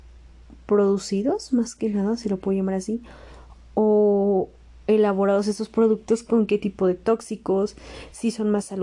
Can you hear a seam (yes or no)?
no